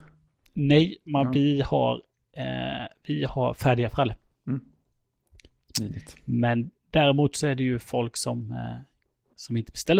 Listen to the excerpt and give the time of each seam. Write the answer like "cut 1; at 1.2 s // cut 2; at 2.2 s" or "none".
none